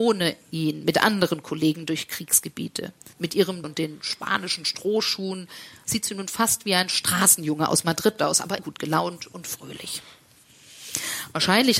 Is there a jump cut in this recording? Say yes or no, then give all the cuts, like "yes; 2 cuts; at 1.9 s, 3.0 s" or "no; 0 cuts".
yes; 3 cuts; at 3.1 s, 3.6 s, 8.6 s